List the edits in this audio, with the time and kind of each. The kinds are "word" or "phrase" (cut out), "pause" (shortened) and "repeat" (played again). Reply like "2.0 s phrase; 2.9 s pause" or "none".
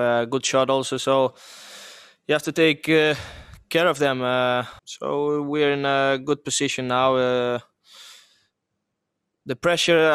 4.8 s pause

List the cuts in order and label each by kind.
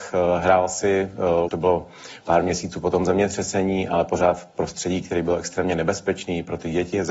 1.5 s word

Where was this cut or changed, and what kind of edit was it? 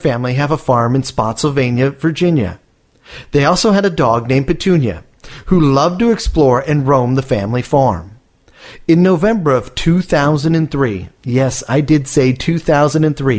11.2 s pause

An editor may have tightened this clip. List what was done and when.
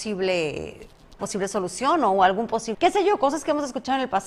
1.2 s word; 2.7 s phrase

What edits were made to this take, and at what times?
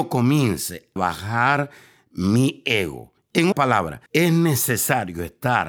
1.0 s word; 3.5 s word; 4.1 s pause

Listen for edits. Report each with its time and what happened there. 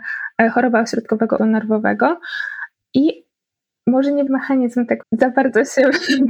1.4 s word; 4.3 s word; 5.0 s word

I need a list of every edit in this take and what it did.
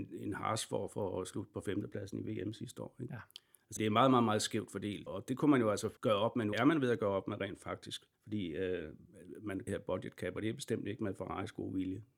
3.8 s word; 5.1 s word; 6.0 s pause; 6.5 s phrase; 8.1 s pause; 9.7 s phrase

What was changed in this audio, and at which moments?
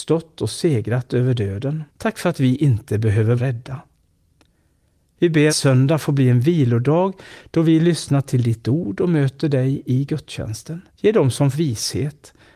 1.9 s pause; 3.4 s word; 5.5 s phrase; 10.9 s pause; 11.5 s word

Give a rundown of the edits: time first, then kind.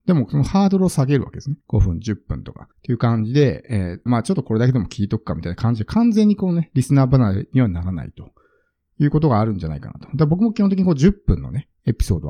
1.6 s pause; 2.7 s pause; 4.1 s phrase

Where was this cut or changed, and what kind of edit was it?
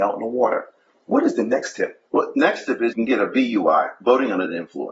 2.1 s pause; 2.9 s word

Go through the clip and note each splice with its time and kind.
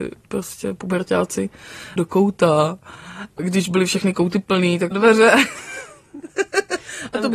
2.0 s phrase; 3.4 s word; 4.9 s phrase

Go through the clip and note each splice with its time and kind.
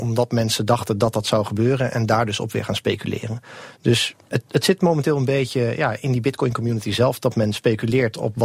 none

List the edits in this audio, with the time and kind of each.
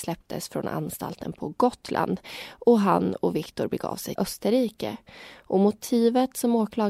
4.2 s word

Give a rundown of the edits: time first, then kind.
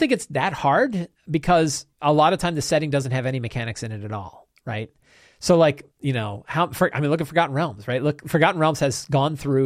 1.9 s pause; 5.9 s pause

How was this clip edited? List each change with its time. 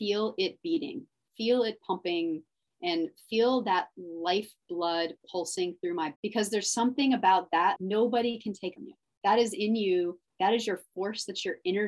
6.2 s word; 7.8 s word; 8.8 s phrase

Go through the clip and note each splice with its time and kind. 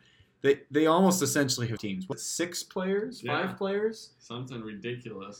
1.8 s word; 2.1 s word

